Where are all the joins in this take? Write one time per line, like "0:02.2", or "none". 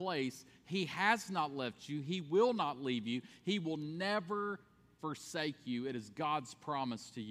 none